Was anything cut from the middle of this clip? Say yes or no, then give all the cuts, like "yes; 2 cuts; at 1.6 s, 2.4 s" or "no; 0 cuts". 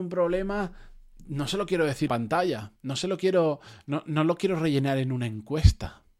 yes; 3 cuts; at 2.1 s, 2.8 s, 4.0 s